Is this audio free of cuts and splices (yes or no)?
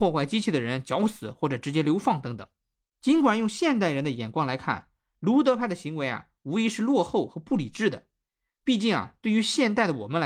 no